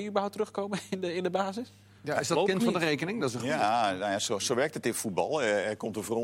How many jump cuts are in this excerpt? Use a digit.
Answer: 1